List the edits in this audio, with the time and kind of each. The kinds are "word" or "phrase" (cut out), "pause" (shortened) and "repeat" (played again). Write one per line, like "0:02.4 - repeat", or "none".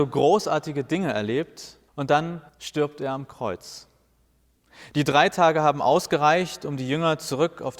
0:01.9 - pause
0:02.5 - pause